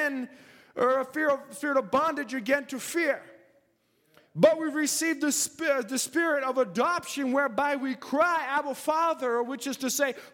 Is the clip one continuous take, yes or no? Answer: yes